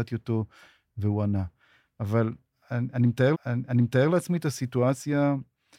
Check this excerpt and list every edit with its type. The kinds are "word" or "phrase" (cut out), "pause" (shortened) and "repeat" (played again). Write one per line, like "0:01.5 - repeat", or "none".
0:03.3 - repeat